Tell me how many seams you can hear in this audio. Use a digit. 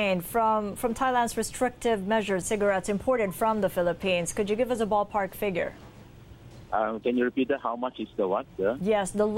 2